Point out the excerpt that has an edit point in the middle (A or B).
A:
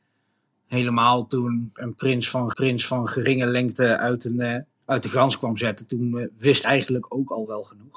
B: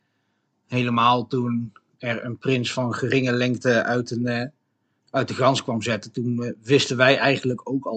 A